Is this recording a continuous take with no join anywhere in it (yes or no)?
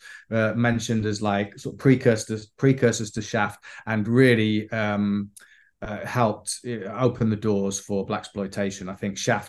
yes